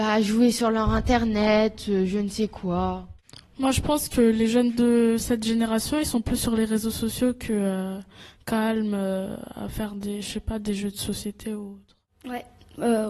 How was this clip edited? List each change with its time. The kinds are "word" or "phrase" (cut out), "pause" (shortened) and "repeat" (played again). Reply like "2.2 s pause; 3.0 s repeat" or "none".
none

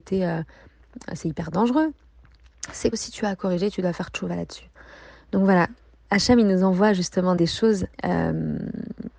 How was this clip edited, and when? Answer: 2.9 s word; 7.4 s word; 7.9 s pause

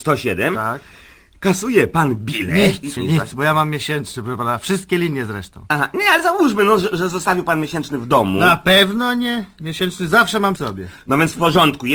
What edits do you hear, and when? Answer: 3.0 s word; 10.6 s word

